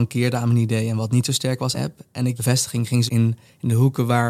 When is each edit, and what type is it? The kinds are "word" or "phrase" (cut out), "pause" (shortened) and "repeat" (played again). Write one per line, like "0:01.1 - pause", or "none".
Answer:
0:01.7 - phrase
0:02.4 - word
0:03.1 - word